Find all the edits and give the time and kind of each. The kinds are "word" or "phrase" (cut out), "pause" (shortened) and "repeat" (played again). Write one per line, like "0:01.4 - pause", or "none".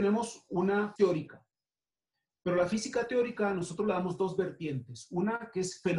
0:01.0 - phrase